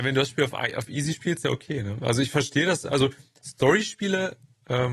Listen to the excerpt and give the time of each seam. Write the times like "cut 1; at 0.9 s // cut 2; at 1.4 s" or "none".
cut 1; at 1.4 s